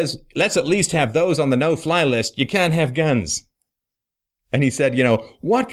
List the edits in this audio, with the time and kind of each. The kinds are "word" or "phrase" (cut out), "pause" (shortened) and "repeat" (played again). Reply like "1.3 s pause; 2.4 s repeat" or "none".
none